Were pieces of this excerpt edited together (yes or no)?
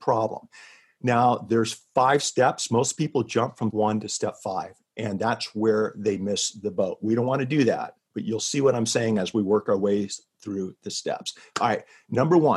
yes